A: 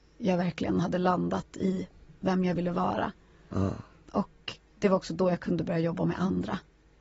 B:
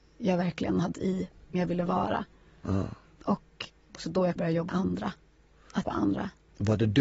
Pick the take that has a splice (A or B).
B